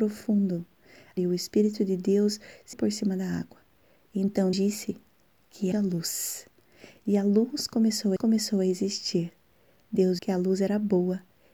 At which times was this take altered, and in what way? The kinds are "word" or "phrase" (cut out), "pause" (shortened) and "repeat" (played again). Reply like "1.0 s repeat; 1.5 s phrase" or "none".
1.2 s phrase; 2.7 s word; 4.5 s word; 5.7 s word; 8.2 s repeat; 10.2 s word